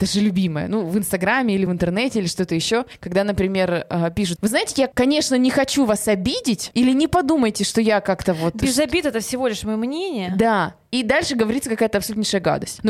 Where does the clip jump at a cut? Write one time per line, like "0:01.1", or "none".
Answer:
none